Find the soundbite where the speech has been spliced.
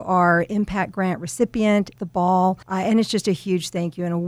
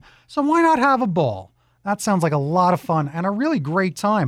first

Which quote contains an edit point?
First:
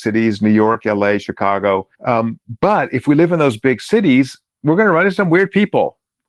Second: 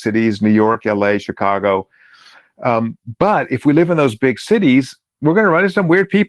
first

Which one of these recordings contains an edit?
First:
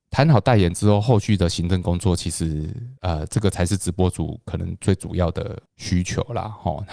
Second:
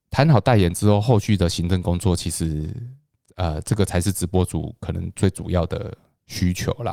first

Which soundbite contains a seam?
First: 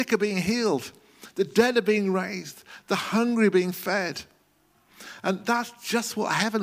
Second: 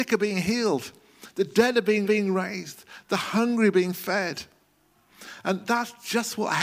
second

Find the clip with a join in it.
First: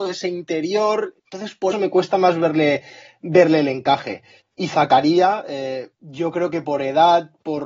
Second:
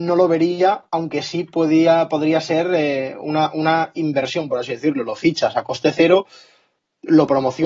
first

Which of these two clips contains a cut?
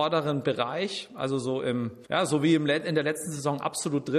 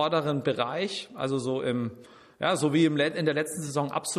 first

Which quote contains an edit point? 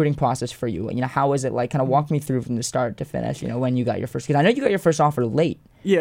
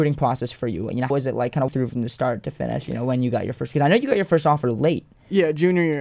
second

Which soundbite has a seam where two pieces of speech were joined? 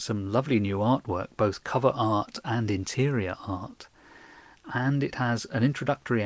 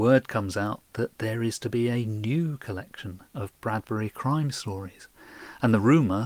second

